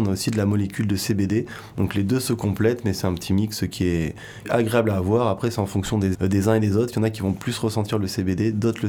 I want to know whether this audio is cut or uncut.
cut